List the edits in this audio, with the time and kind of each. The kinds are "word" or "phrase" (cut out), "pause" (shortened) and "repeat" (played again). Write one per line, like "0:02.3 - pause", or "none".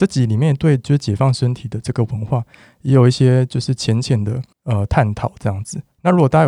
0:04.5 - pause

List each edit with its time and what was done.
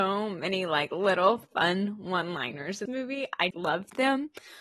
0:02.9 - word
0:03.5 - word

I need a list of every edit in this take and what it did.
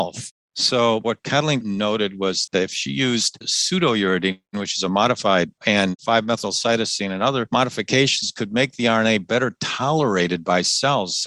0:01.6 - word
0:02.5 - word
0:05.6 - word

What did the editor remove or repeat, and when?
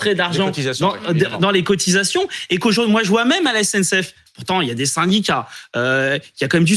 none

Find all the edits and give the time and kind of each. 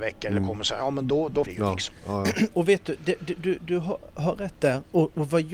0:01.5 - word

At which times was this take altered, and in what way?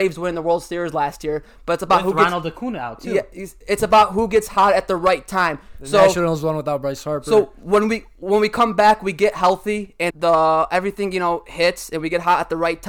0:10.1 - word

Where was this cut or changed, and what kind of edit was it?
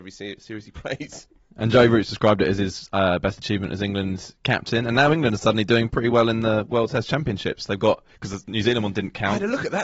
0:08.1 - pause

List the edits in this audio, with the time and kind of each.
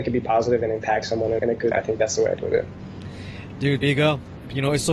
0:01.4 - word
0:01.7 - word
0:02.4 - word
0:03.8 - word

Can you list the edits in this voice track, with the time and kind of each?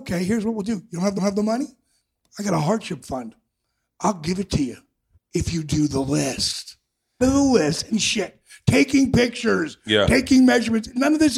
0:01.2 - repeat
0:05.1 - pause
0:07.2 - word
0:07.9 - phrase

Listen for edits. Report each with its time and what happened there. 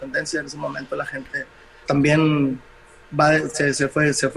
0:01.9 - word

